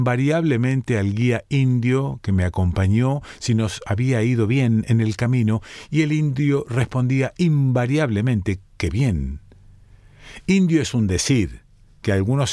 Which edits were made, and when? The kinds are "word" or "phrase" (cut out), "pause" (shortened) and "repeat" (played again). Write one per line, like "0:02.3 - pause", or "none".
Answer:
none